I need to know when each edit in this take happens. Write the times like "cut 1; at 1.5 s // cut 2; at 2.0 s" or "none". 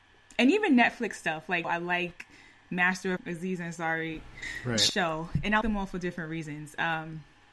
cut 1; at 1.6 s // cut 2; at 3.2 s // cut 3; at 5.6 s